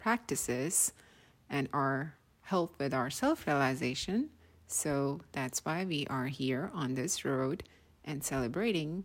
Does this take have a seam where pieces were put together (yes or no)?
no